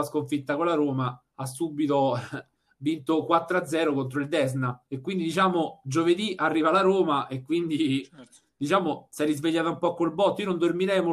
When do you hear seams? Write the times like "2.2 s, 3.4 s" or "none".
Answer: 1.3 s, 4.9 s